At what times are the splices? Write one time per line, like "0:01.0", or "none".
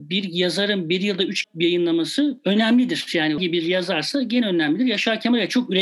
0:01.4
0:03.4